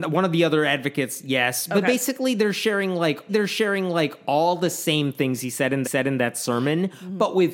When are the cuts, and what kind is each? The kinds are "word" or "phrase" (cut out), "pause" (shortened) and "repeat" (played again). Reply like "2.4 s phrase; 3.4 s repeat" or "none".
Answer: 3.3 s repeat; 5.8 s repeat